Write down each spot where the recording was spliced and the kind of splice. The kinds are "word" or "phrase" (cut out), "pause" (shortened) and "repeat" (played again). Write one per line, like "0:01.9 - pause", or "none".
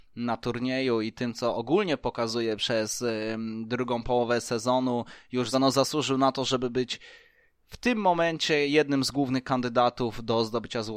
0:05.5 - word